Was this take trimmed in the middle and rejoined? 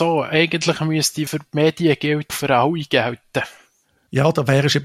yes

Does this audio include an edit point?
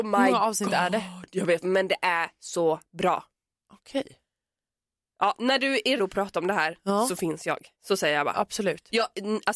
yes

